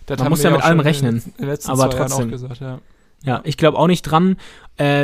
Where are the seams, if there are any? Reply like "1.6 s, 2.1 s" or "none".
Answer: none

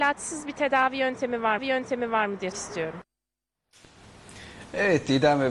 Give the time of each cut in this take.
1.6 s, 2.5 s

